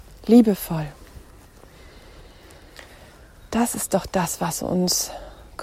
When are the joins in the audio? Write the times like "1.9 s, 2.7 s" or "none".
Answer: none